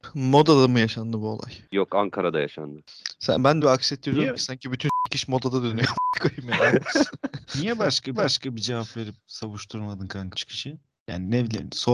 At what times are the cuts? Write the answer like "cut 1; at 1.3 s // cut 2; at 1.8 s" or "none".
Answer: cut 1; at 3.6 s // cut 2; at 8.1 s // cut 3; at 10.3 s